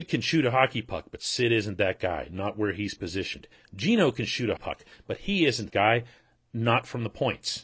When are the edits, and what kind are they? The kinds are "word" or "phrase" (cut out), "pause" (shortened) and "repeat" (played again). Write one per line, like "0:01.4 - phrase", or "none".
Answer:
0:04.6 - word
0:05.7 - word

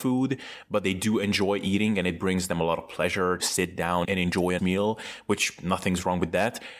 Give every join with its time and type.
0:03.4 - word
0:04.0 - word
0:04.6 - word

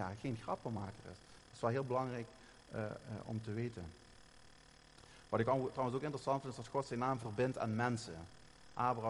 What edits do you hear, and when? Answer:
none

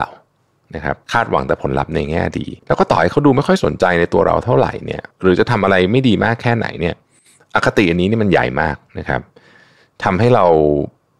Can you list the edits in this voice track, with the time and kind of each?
0:01.0 - pause
0:02.6 - pause
0:05.1 - pause
0:08.9 - pause

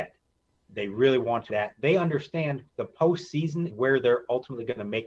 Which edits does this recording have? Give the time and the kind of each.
0:01.5 - word
0:02.7 - pause
0:03.7 - word

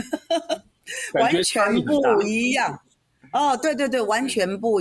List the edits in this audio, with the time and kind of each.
none

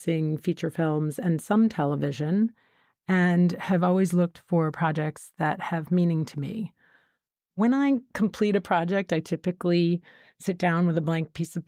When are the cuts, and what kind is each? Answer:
none

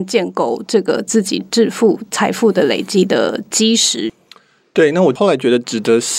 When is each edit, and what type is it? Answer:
none

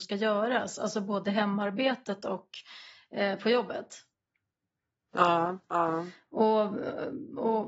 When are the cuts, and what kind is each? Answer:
none

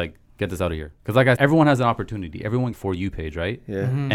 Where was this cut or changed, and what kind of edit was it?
0:01.0 - pause
0:01.4 - word
0:02.7 - phrase

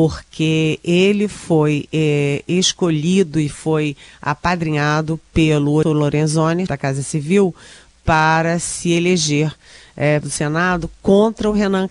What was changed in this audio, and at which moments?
0:05.8 - word
0:06.7 - word
0:10.2 - word

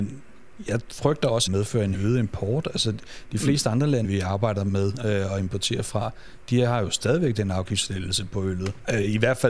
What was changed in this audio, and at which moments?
0:01.5 - phrase
0:01.9 - word
0:04.0 - word

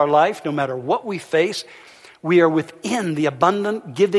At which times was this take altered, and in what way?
none

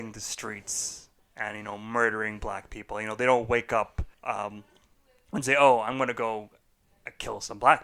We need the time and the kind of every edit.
0:04.1 - pause

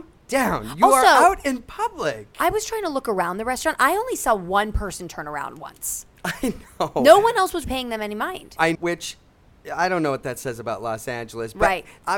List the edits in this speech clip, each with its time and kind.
0:07.6 - word
0:08.7 - word

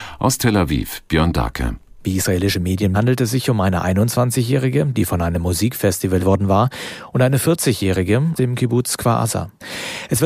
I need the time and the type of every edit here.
0:02.9 - word
0:06.2 - word
0:08.4 - word

